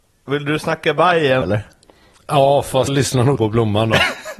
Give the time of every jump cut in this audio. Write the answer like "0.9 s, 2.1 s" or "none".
1.4 s, 2.9 s, 3.4 s